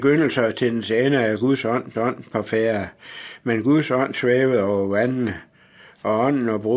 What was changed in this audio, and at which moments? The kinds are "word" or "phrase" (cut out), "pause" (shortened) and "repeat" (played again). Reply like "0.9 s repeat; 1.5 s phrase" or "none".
1.9 s repeat